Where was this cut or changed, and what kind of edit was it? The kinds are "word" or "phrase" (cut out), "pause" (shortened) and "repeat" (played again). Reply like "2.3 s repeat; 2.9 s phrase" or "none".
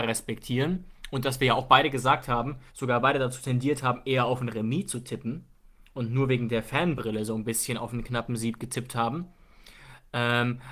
2.7 s pause